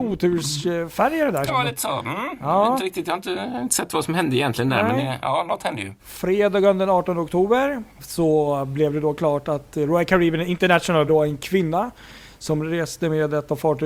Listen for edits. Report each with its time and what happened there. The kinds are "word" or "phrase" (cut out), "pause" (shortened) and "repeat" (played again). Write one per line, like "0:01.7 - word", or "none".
0:01.5 - phrase
0:06.0 - pause
0:08.0 - word
0:11.1 - word

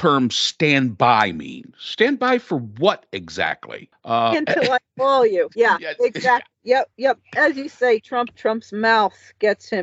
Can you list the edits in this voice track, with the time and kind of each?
0:04.3 - phrase
0:05.5 - pause
0:06.5 - pause
0:08.3 - word

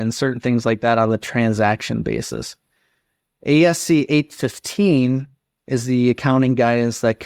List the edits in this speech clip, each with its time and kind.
none

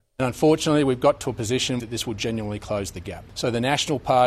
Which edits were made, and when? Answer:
0:01.8 - phrase

